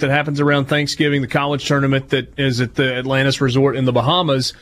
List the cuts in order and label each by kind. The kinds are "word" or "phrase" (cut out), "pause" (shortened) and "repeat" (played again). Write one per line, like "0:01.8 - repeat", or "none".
none

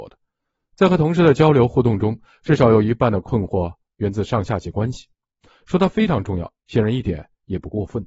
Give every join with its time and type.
none

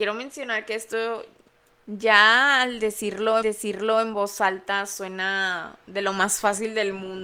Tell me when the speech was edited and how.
0:03.4 - repeat

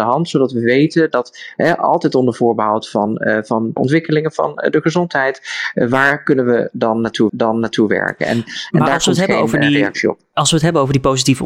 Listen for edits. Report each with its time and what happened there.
0:03.8 - word
0:07.3 - repeat

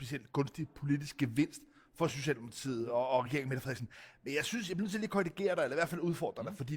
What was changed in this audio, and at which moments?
none

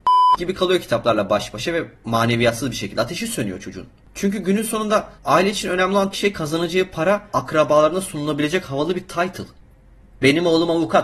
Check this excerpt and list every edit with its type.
0:05.2 - pause
0:06.1 - word
0:07.3 - word

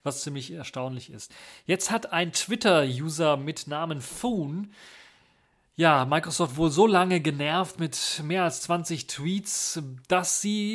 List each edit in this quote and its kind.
none

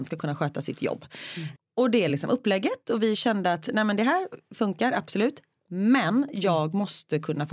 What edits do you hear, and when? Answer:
none

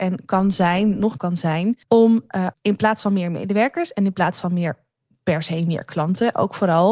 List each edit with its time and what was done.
0:01.2 - phrase
0:01.8 - pause
0:02.5 - word

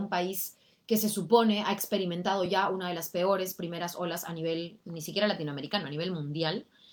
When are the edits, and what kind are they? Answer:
none

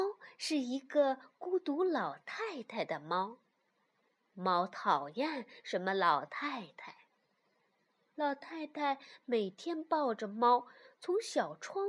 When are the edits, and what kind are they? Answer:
none

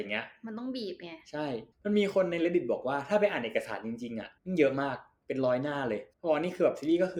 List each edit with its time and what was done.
0:01.7 - pause
0:04.4 - pause
0:06.1 - pause

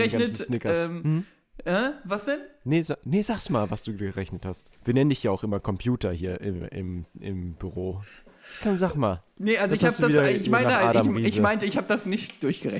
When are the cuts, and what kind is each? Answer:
0:04.7 - pause

